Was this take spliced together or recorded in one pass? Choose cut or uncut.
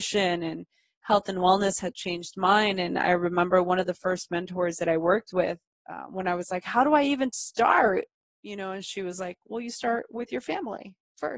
uncut